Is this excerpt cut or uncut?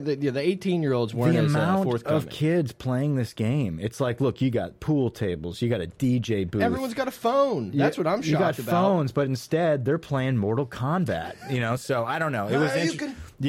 uncut